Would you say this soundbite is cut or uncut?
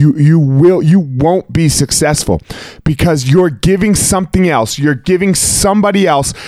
uncut